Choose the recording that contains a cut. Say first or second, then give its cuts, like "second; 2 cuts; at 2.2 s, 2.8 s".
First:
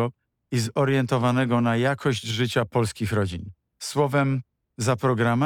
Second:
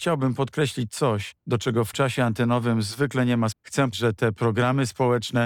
second; 4 cuts; at 1.4 s, 1.9 s, 3.5 s, 3.9 s